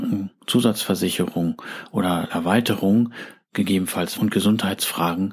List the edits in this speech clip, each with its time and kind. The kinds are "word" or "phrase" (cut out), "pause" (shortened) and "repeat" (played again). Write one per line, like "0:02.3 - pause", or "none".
0:02.3 - word
0:04.1 - word